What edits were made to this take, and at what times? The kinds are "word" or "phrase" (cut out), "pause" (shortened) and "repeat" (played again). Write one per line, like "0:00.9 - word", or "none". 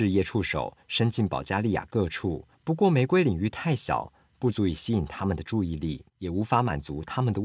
0:02.5 - pause
0:06.1 - pause